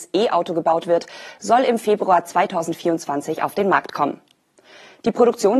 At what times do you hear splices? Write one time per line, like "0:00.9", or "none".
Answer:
none